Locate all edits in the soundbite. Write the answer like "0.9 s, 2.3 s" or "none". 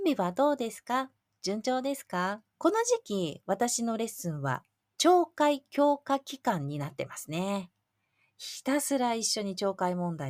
2.5 s